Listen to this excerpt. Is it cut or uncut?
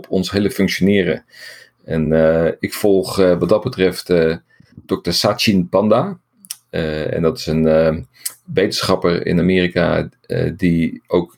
uncut